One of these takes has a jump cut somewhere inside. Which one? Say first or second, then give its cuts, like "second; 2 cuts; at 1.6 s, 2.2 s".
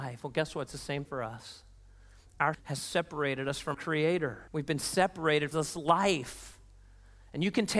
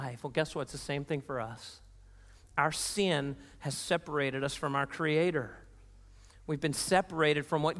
first; 5 cuts; at 1.1 s, 2.5 s, 3.7 s, 4.5 s, 5.5 s